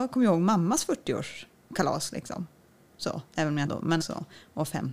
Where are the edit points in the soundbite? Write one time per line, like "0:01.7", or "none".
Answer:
0:03.3
0:03.7
0:04.0